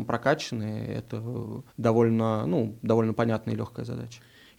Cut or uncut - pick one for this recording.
cut